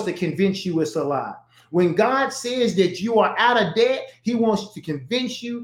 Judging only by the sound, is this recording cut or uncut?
uncut